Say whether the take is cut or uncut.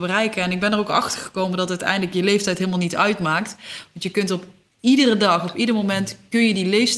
uncut